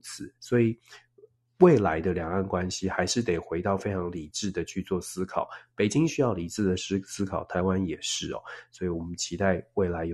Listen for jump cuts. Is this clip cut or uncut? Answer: uncut